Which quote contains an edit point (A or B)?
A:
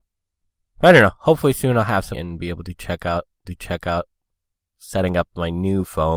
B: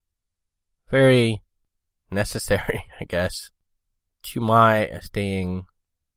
A